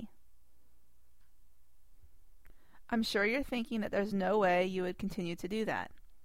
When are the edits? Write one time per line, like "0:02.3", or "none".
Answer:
none